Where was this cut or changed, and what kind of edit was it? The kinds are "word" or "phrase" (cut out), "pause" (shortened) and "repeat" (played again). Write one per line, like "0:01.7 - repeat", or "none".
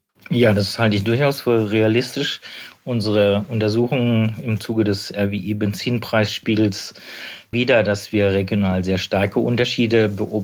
0:07.5 - phrase